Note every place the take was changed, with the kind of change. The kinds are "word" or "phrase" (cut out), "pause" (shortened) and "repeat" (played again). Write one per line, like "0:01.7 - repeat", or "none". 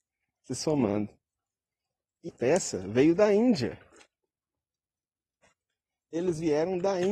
0:02.3 - word

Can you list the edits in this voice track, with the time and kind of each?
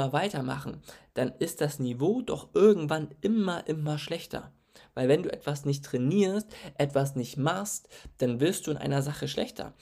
none

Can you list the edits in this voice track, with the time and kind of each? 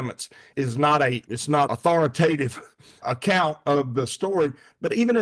0:01.7 - word

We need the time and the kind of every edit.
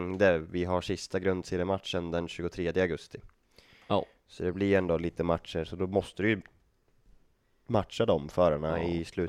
none

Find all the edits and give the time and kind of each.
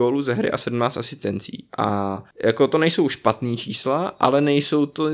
0:02.3 - pause

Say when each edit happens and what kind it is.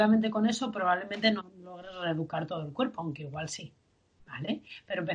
none

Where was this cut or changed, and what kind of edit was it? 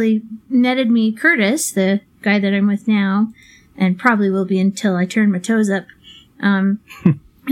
none

